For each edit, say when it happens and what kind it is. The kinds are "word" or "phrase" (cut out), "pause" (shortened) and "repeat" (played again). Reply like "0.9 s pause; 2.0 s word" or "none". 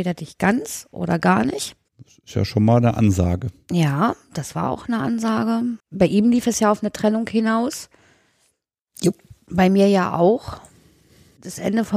1.9 s pause; 5.8 s pause